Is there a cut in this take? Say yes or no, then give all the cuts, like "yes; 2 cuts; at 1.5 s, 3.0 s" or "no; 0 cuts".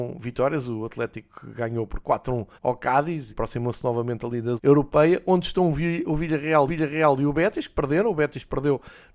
yes; 4 cuts; at 2.5 s, 3.3 s, 4.6 s, 6.7 s